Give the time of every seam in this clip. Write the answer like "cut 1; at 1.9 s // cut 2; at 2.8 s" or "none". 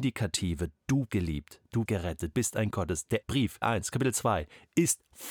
cut 1; at 1.1 s // cut 2; at 1.9 s // cut 3; at 2.3 s // cut 4; at 2.7 s // cut 5; at 3.2 s // cut 6; at 3.6 s